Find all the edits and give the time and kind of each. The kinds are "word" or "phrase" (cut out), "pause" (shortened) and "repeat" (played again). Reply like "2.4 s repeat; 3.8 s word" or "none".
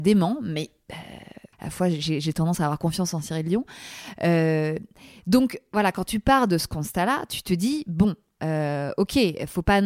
1.5 s pause